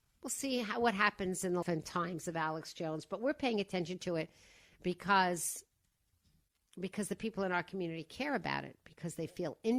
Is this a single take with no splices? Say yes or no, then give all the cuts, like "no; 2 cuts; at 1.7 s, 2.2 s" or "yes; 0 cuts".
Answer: no; 1 cut; at 1.6 s